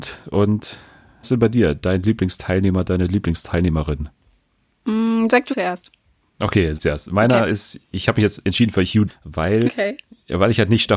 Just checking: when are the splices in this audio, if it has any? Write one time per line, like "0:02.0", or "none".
0:01.2
0:05.5
0:06.7
0:07.9
0:09.1
0:09.7